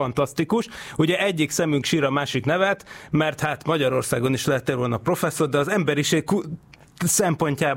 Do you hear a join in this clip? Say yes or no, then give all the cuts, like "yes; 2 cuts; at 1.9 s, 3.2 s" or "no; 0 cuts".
no; 0 cuts